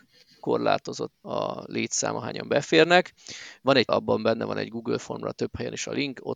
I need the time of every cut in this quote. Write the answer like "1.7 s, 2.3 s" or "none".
1.1 s, 3.9 s